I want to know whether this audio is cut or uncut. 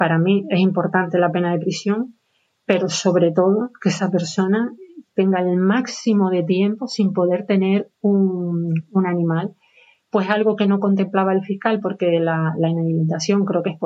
uncut